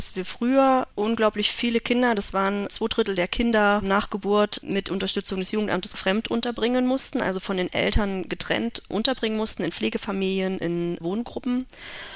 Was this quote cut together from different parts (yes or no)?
no